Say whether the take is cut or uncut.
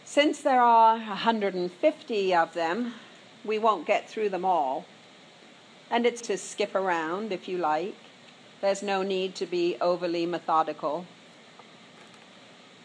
cut